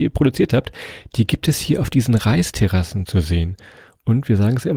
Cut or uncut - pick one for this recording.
uncut